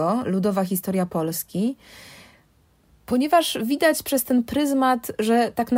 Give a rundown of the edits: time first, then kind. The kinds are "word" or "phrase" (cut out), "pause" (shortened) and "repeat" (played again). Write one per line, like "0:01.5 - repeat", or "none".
none